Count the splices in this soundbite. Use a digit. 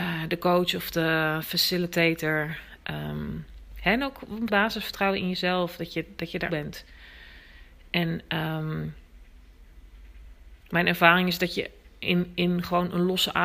2